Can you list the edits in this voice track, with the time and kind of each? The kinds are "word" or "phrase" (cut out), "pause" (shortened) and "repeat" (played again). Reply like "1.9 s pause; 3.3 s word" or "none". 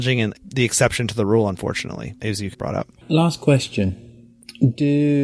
2.5 s word; 3.0 s pause